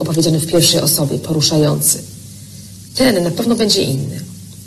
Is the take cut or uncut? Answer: uncut